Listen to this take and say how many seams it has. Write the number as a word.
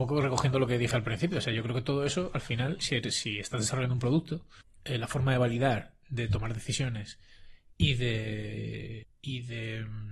zero